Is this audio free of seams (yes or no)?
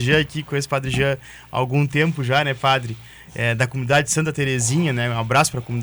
yes